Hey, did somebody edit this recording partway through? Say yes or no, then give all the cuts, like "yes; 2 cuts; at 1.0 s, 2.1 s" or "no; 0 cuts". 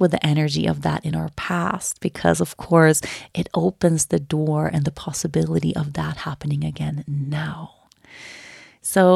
no; 0 cuts